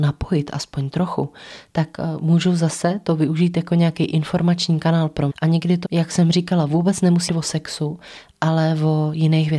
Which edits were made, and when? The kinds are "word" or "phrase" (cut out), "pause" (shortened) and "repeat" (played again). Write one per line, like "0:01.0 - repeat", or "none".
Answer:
0:05.3 - word
0:05.8 - word
0:07.3 - word